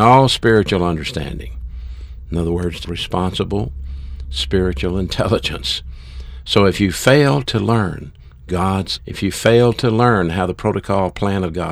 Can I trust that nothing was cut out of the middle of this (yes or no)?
no